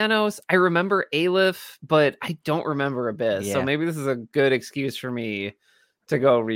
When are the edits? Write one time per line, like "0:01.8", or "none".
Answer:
none